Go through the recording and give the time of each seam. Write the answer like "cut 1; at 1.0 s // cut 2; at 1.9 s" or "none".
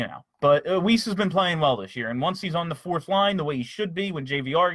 none